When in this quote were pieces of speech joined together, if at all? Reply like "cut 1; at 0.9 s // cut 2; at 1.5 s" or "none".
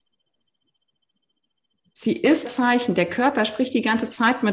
cut 1; at 2.5 s